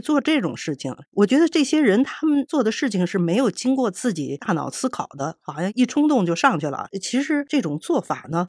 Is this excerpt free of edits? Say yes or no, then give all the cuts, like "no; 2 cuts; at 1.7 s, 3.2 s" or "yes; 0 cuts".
no; 1 cut; at 1.1 s